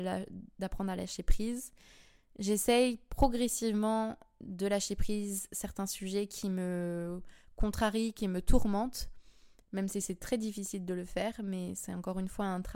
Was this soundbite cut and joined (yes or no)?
no